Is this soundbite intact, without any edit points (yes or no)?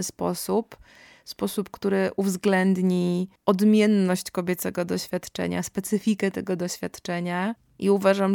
yes